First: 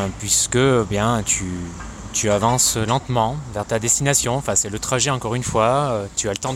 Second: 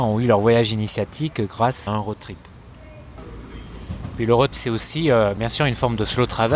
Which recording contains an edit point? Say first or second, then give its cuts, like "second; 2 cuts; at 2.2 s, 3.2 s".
second; 3 cuts; at 1.9 s, 4.5 s, 5.4 s